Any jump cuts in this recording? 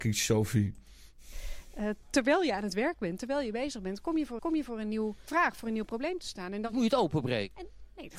yes; 2 cuts; at 4.4 s, 5.3 s

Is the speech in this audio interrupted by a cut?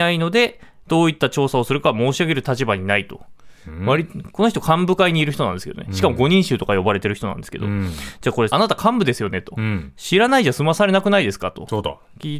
yes; 1 cut; at 8.5 s

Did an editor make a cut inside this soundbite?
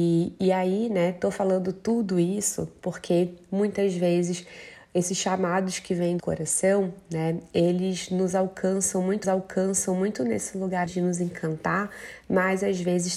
yes; 4 cuts; at 6.2 s, 9.2 s, 10.9 s, 12.2 s

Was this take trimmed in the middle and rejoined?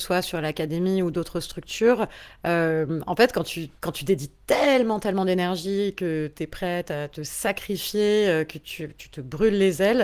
yes; 1 cut; at 3.8 s

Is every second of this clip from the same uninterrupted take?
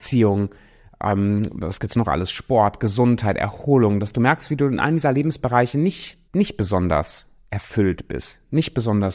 no; 1 cut; at 6.3 s

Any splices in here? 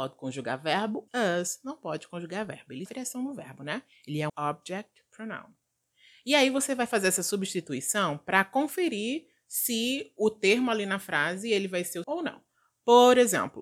yes; 4 cuts; at 1.1 s, 2.9 s, 4.3 s, 12.0 s

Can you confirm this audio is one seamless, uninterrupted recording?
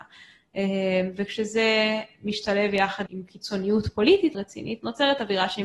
no; 2 cuts; at 3.1 s, 4.3 s

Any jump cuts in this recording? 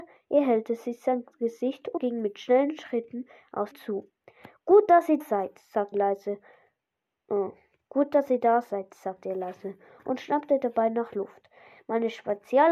yes; 4 cuts; at 2.0 s, 3.7 s, 5.2 s, 5.9 s

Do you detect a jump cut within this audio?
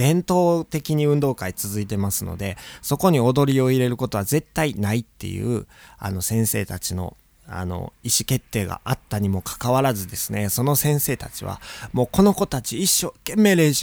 no; 0 cuts

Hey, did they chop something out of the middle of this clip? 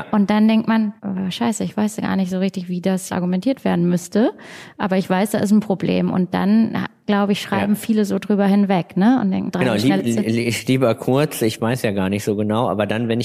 yes; 4 cuts; at 1.0 s, 3.1 s, 9.5 s, 10.0 s

